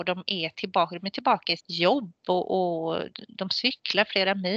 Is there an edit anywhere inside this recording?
yes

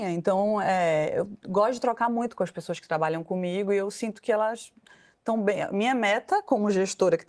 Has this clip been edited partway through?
no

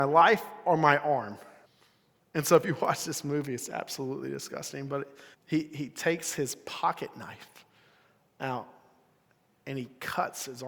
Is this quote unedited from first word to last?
no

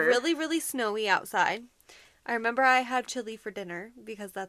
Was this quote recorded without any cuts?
no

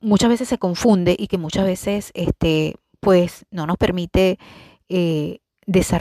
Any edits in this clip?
no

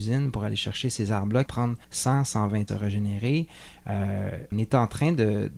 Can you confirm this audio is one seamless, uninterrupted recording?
no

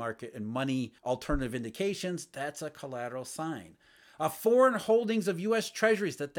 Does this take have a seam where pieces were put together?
yes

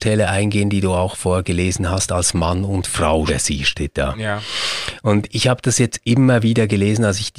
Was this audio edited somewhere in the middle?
yes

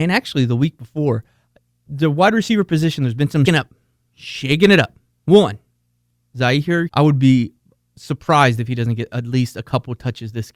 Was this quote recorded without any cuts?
no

